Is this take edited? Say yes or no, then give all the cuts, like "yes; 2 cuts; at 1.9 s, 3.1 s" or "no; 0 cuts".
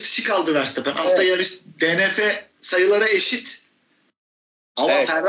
no; 0 cuts